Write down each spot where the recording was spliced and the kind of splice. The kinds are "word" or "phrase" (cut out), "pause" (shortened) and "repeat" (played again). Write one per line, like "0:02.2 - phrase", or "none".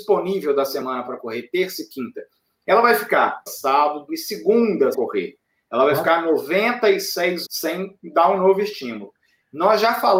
0:03.5 - word
0:04.1 - word
0:04.9 - word
0:07.4 - word